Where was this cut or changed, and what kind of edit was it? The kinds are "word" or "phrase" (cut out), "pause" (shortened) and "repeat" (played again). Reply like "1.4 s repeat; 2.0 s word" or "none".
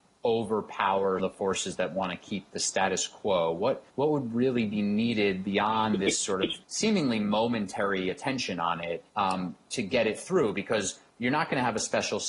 1.2 s word; 3.9 s pause; 6.6 s pause; 9.1 s pause; 11.1 s pause